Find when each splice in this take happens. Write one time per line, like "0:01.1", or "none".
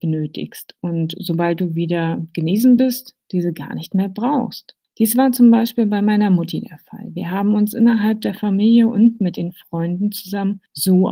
none